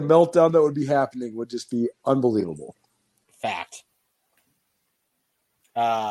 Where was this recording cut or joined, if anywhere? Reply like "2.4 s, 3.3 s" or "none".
none